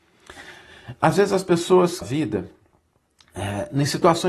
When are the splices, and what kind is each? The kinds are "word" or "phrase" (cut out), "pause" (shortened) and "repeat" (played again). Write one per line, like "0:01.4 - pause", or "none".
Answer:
0:02.0 - phrase